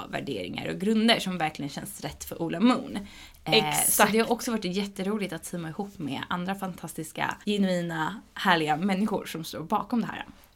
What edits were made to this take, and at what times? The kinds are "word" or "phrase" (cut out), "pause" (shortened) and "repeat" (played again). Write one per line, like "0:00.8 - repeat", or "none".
0:07.4 - pause